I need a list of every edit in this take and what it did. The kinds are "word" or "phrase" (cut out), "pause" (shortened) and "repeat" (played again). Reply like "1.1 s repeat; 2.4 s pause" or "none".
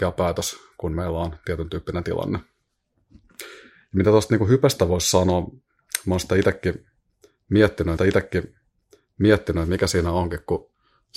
8.0 s repeat